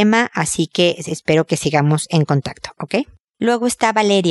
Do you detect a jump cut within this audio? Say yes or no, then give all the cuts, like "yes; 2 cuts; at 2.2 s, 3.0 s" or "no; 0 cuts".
no; 0 cuts